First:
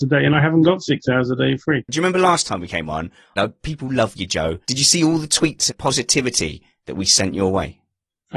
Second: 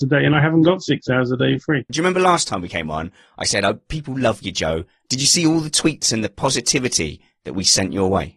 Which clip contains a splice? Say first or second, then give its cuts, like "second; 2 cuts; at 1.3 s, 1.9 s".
first; 3 cuts; at 3.4 s, 4.6 s, 5.7 s